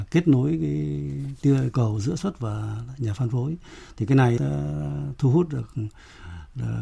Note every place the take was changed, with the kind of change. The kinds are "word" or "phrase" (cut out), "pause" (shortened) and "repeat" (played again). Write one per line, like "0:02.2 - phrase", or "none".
0:01.7 - word
0:02.2 - word
0:04.4 - word